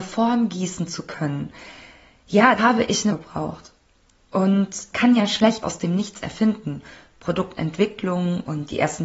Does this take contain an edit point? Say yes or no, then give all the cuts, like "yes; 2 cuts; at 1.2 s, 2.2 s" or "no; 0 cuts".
yes; 4 cuts; at 2.6 s, 3.1 s, 4.9 s, 5.6 s